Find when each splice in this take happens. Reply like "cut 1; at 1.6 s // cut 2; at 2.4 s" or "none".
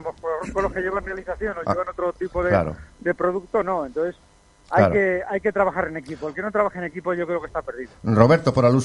none